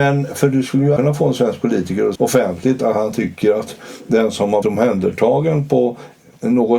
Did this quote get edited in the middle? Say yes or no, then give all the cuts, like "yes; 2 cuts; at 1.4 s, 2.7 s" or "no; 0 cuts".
yes; 3 cuts; at 1.0 s, 2.2 s, 4.6 s